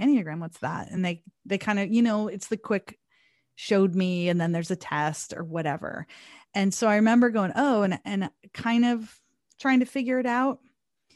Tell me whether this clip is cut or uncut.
uncut